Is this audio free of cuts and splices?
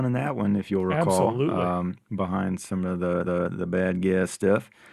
no; 2 cuts; at 2.0 s, 3.2 s

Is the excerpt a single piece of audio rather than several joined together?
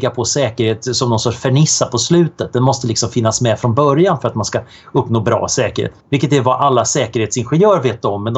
no; 1 cut; at 6.0 s

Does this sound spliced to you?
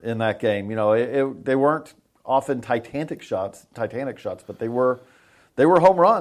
no; 0 cuts

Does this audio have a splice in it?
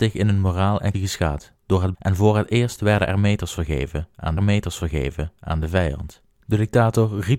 yes; 4 cuts; at 0.9 s, 1.9 s, 4.4 s, 6.3 s

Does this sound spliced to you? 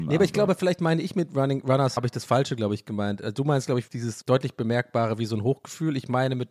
yes; 3 cuts; at 2.0 s, 3.9 s, 4.2 s

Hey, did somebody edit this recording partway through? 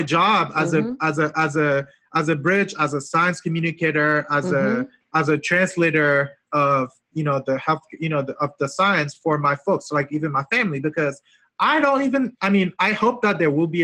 yes; 1 cut; at 6.4 s

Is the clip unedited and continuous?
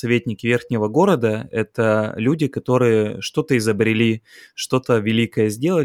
yes; 0 cuts

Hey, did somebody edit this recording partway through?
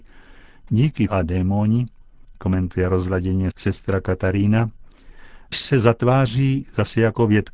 yes; 3 cuts; at 1.1 s, 2.3 s, 5.5 s

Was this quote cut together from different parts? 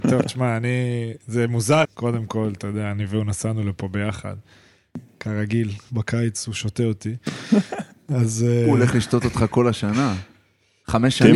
yes; 1 cut; at 1.8 s

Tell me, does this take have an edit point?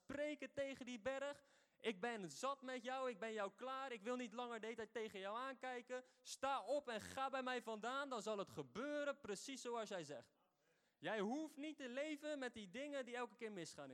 no; 0 cuts

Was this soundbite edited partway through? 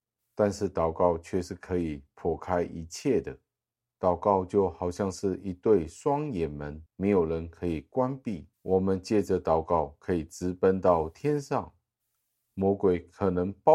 yes; 2 cuts; at 6.9 s, 8.5 s

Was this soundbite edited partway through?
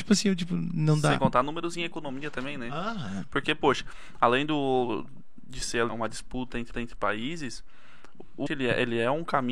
yes; 4 cuts; at 1.2 s, 5.9 s, 6.7 s, 8.5 s

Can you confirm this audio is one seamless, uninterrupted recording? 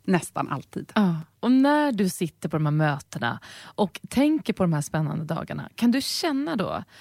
no; 1 cut; at 1.3 s

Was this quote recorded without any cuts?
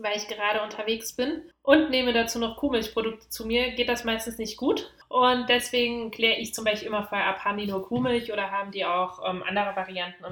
yes; 0 cuts

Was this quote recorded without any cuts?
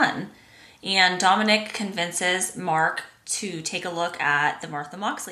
yes; 0 cuts

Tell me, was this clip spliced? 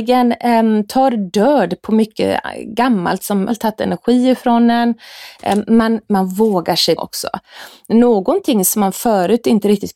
yes; 2 cuts; at 3.5 s, 7.0 s

